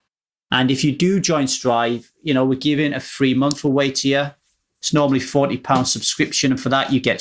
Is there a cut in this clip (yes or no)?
no